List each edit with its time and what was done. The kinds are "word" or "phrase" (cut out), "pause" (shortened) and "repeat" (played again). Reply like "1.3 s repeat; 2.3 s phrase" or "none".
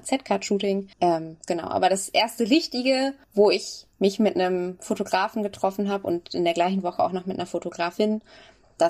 0.9 s pause; 3.2 s pause